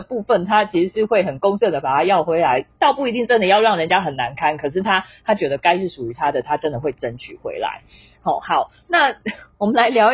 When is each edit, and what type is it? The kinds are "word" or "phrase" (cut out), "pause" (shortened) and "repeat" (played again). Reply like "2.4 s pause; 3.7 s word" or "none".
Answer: none